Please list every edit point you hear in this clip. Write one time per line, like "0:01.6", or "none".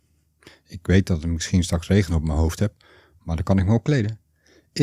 none